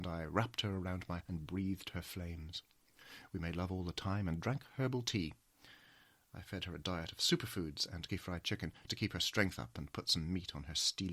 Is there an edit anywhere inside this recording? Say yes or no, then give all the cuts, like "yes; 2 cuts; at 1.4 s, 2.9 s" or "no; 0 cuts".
yes; 3 cuts; at 1.2 s, 8.1 s, 8.9 s